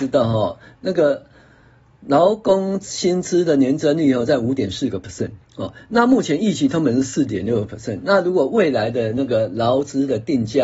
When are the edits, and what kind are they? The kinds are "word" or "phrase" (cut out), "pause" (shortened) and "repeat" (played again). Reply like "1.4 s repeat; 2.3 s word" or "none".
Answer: 5.5 s pause